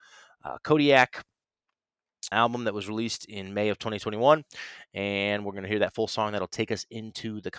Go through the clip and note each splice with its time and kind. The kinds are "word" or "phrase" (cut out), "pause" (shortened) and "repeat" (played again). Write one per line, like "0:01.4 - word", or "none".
0:02.3 - word